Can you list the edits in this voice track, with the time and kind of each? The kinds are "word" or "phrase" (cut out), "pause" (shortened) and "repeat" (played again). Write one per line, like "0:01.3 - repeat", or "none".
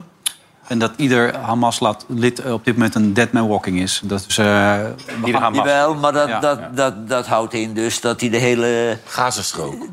none

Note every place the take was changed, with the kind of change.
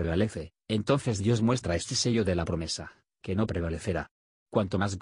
none

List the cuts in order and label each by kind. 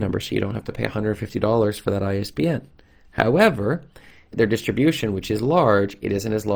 0:04.3 - word

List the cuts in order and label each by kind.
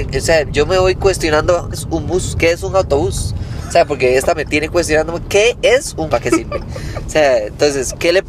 0:01.7 - phrase
0:04.3 - word
0:06.1 - phrase

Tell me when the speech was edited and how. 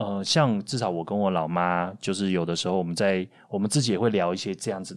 none

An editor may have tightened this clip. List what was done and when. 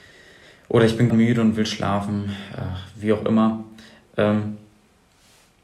0:01.1 - word

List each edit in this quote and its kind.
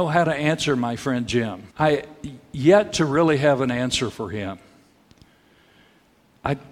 0:01.7 - pause

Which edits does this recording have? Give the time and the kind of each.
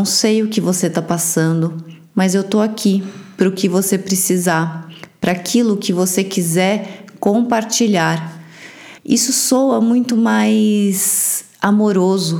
0:09.0 - pause

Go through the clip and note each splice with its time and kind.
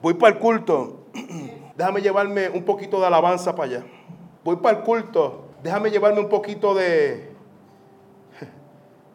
0:01.7 - pause
0:04.4 - pause
0:05.5 - pause

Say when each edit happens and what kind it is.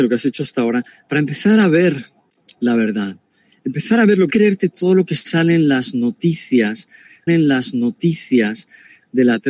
0:04.3 - phrase
0:07.3 - repeat

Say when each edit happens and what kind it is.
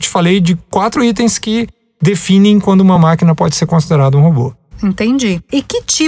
none

